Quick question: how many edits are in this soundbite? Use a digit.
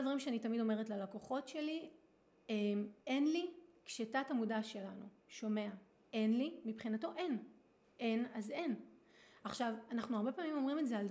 1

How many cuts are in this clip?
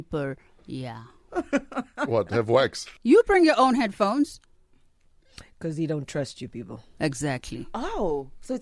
1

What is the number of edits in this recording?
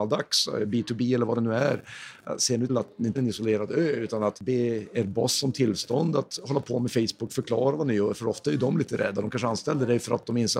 2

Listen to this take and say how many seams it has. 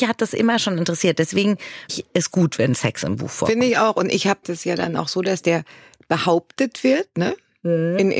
2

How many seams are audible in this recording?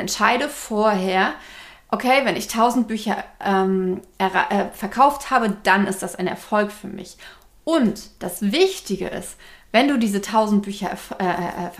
0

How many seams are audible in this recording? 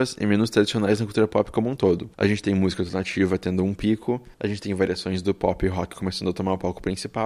2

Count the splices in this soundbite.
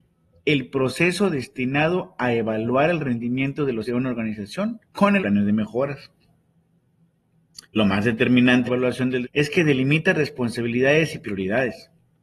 6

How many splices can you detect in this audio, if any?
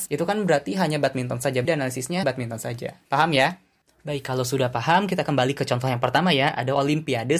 2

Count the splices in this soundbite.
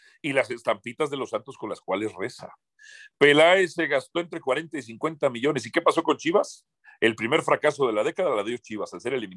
0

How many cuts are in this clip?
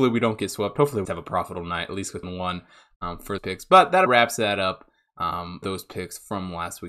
5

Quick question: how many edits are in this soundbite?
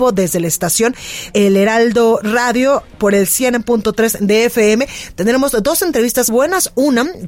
2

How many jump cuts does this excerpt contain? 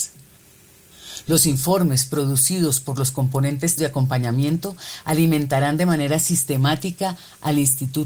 1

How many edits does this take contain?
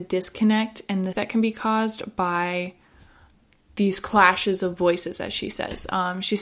1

